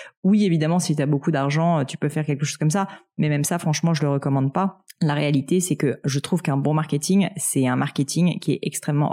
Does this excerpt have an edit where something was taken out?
yes; 1 cut; at 4.9 s

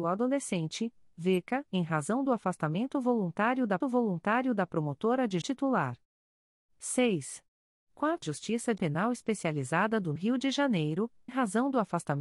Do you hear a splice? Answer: yes; 7 cuts; at 1.7 s, 3.8 s, 5.4 s, 8.2 s, 8.8 s, 10.2 s, 11.3 s

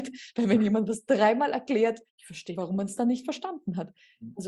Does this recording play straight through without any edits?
no; 2 cuts; at 2.1 s, 2.5 s

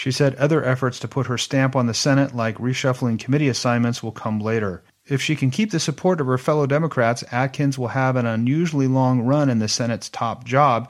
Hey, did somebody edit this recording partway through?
no; 0 cuts

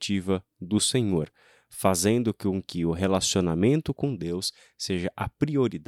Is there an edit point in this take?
no; 0 cuts

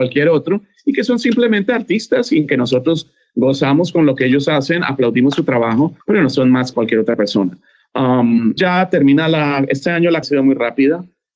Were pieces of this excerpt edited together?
yes; 4 cuts; at 6.0 s, 6.7 s, 8.6 s, 10.2 s

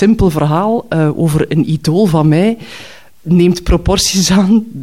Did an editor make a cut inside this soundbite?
no; 0 cuts

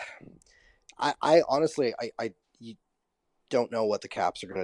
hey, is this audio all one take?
yes; 0 cuts

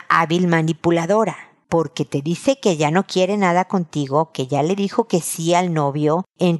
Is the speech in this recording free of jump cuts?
yes; 0 cuts

